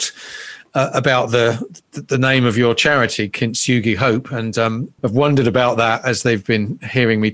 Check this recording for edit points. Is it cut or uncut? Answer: cut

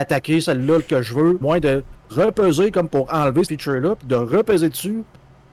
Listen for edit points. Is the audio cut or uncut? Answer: cut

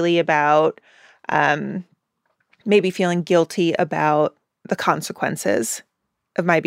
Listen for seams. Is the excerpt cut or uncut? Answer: uncut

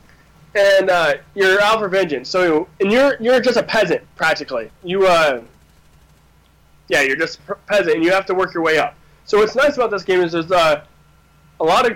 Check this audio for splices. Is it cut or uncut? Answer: cut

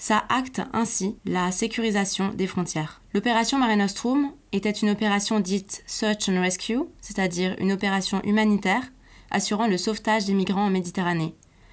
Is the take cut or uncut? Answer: uncut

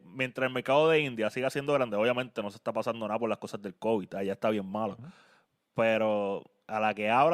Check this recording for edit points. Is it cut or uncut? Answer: uncut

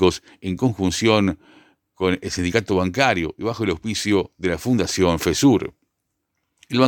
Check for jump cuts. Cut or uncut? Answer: uncut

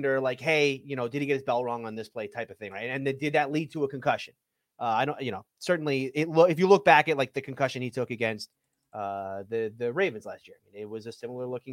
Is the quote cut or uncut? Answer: uncut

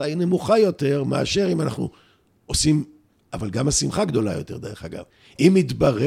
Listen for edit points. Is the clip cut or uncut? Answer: uncut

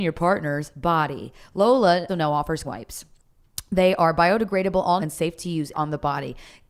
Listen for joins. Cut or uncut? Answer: cut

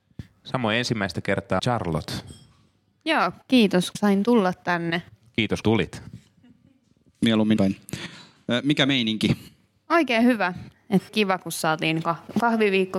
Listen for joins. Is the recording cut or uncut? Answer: cut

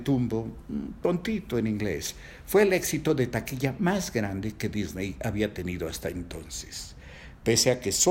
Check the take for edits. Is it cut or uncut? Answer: uncut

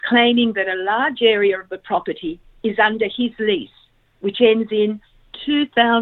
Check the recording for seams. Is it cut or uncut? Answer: uncut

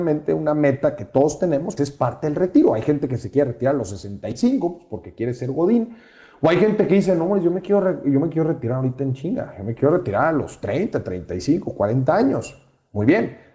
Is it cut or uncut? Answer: cut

